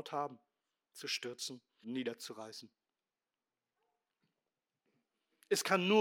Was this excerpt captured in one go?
no; 1 cut; at 1.8 s

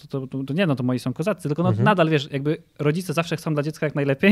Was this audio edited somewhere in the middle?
no; 0 cuts

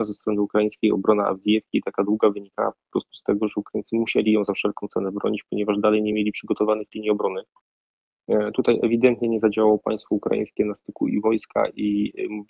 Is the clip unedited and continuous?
yes; 0 cuts

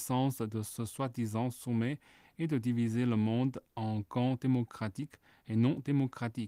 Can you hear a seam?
no; 0 cuts

